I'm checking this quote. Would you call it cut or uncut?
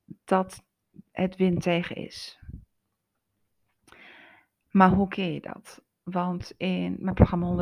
uncut